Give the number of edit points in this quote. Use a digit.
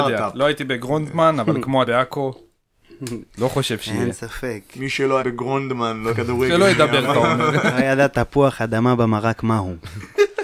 3